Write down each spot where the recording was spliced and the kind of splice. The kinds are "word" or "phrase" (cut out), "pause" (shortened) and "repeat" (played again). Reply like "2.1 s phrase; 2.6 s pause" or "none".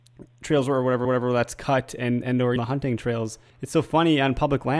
1.0 s repeat; 2.6 s word; 3.5 s pause